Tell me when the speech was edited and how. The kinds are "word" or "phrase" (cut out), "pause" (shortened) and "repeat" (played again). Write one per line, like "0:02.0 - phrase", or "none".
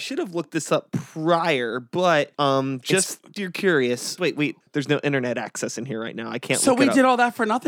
0:02.3 - pause
0:03.4 - phrase
0:04.2 - word
0:04.6 - pause